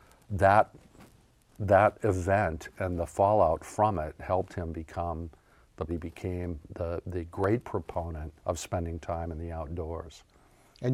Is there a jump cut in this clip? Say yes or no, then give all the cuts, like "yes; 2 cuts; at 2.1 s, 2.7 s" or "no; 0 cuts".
yes; 2 cuts; at 5.9 s, 8.4 s